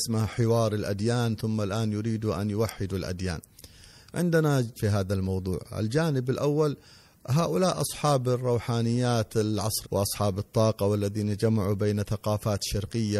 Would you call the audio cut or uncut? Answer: cut